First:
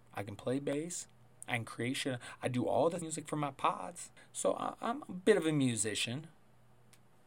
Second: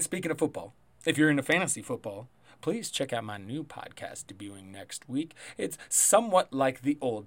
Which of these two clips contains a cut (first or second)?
first